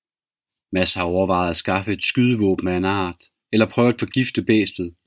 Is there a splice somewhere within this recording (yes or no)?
no